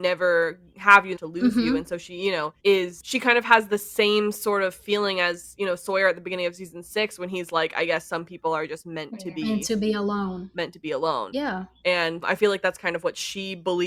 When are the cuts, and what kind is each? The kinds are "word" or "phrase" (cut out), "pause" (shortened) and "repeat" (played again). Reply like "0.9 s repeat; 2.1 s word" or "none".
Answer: 1.2 s phrase; 2.6 s pause; 12.2 s word